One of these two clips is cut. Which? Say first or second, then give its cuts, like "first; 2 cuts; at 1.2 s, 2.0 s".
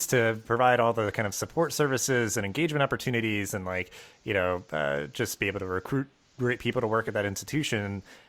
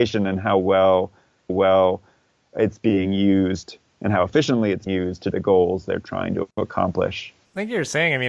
second; 3 cuts; at 1.5 s, 4.9 s, 5.3 s